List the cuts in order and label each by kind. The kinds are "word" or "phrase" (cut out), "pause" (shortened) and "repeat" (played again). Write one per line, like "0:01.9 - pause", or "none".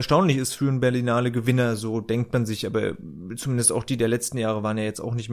none